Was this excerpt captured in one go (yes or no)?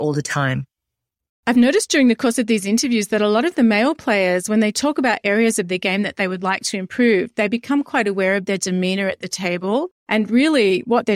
yes